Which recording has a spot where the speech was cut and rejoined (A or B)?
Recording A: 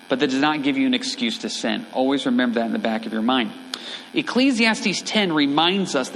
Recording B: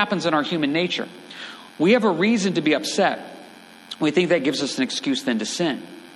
B